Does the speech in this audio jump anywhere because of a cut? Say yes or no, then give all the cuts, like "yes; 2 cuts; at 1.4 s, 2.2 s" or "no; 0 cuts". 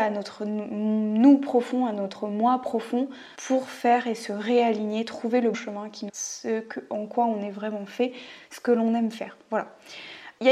yes; 3 cuts; at 3.3 s, 5.5 s, 6.1 s